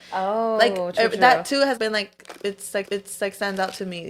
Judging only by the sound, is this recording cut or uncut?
cut